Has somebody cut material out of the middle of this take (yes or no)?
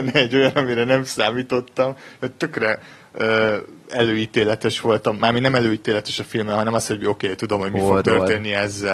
no